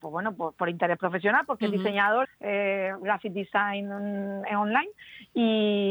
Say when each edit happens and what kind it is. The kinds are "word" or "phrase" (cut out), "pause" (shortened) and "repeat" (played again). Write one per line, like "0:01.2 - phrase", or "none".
0:02.2 - phrase